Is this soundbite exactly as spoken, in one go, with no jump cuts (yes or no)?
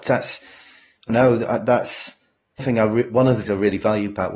no